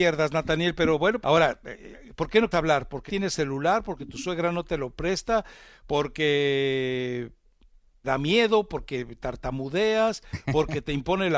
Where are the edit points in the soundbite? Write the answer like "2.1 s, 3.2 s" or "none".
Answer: 1.2 s, 2.5 s, 3.1 s, 8.0 s